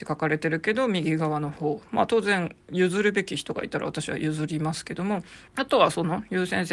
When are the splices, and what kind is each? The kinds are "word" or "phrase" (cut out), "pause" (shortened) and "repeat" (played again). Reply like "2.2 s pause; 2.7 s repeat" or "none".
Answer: 5.5 s pause

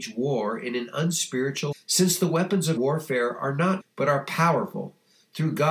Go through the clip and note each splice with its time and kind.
1.7 s word; 2.8 s word; 3.8 s word

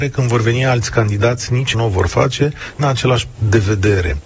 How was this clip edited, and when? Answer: 1.7 s word; 2.8 s word; 3.3 s word

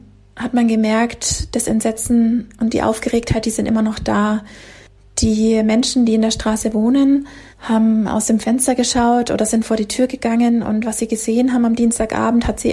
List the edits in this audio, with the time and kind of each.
7.5 s pause

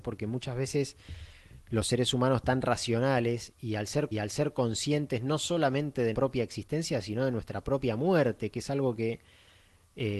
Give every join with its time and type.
4.1 s repeat; 6.1 s word

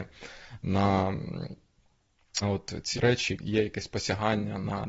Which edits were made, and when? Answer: 2.4 s word; 2.9 s word; 3.4 s word

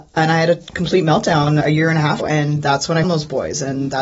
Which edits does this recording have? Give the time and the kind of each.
1.6 s word; 2.2 s word; 3.0 s word

